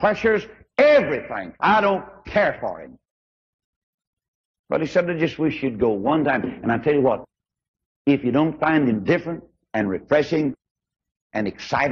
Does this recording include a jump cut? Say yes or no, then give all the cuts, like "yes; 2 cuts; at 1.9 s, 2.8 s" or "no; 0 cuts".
no; 0 cuts